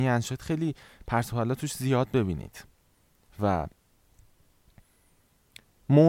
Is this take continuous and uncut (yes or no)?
yes